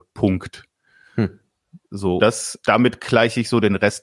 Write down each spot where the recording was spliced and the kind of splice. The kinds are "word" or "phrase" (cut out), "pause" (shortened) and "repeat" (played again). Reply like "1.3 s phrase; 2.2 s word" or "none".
2.2 s word; 2.6 s word

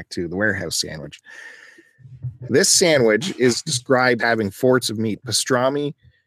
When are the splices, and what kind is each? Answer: 4.2 s word; 4.8 s word

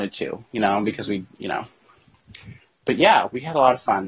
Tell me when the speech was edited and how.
none

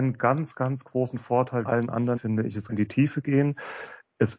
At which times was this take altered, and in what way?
1.7 s word; 2.2 s word; 2.7 s phrase

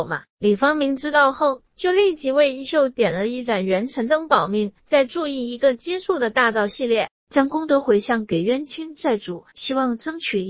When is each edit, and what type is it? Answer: 1.7 s pause; 4.8 s pause; 7.2 s pause; 9.5 s pause

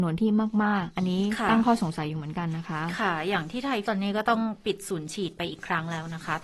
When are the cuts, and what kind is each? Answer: 3.9 s word

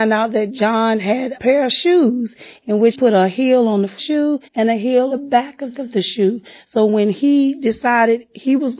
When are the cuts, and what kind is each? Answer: 1.3 s word; 2.9 s word; 4.0 s phrase; 4.4 s pause; 5.1 s word; 5.7 s repeat

